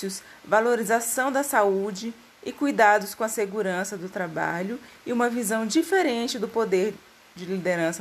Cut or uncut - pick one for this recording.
uncut